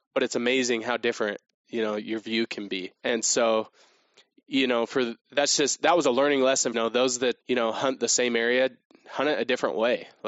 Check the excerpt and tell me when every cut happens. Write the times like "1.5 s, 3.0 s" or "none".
3.0 s, 5.2 s, 6.7 s, 7.4 s